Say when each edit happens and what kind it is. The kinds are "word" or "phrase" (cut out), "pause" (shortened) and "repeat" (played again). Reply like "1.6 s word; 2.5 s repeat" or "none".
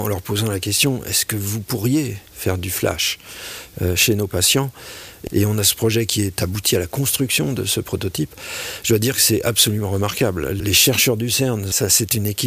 2.3 s pause